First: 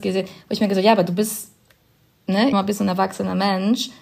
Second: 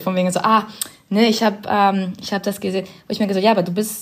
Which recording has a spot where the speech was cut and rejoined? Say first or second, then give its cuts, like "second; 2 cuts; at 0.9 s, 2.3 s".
first; 1 cut; at 2.5 s